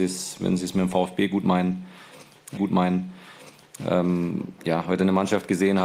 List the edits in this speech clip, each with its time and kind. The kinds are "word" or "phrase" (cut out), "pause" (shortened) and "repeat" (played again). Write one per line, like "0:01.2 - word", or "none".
0:02.6 - repeat

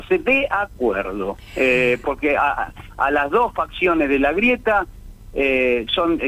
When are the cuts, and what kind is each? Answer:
0:02.0 - phrase

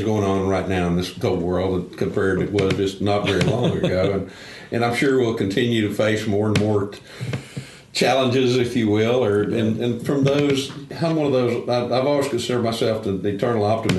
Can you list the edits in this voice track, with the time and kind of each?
0:02.4 - word

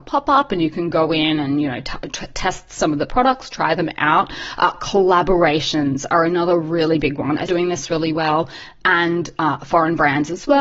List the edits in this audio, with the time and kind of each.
0:07.5 - phrase

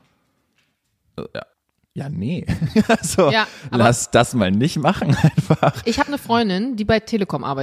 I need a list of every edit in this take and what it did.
0:01.5 - pause

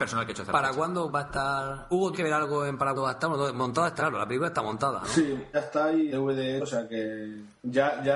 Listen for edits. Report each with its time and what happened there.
0:01.1 - word
0:02.1 - word
0:02.9 - word
0:04.0 - word
0:05.5 - word
0:06.1 - word
0:06.6 - word

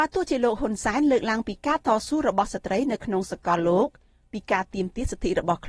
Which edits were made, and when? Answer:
none

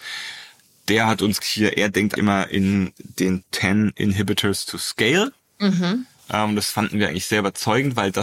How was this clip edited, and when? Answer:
0:01.4 - word
0:02.2 - word
0:03.4 - word

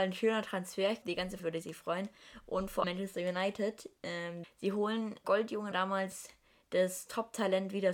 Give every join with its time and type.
0:01.0 - word
0:01.4 - word
0:02.8 - word
0:04.4 - word
0:05.2 - word
0:05.7 - word

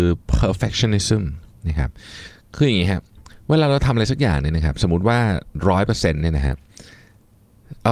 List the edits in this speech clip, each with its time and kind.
none

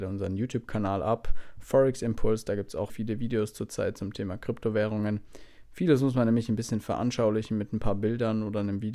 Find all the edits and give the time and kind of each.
0:02.9 - word

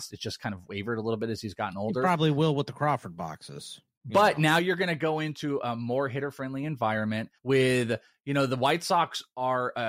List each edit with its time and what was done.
0:07.4 - pause

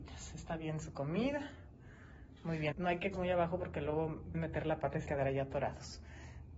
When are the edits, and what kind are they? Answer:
0:02.7 - word
0:03.1 - word
0:04.3 - word
0:05.1 - word

